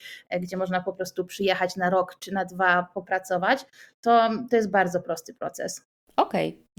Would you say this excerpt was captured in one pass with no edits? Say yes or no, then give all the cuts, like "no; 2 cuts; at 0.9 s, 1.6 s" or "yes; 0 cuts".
yes; 0 cuts